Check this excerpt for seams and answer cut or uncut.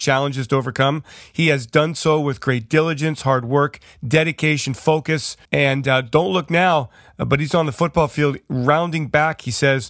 cut